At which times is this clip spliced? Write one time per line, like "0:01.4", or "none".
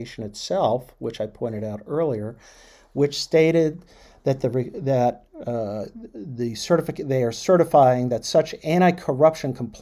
none